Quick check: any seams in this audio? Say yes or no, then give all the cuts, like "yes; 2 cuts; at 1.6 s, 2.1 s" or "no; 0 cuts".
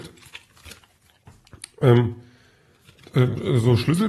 no; 0 cuts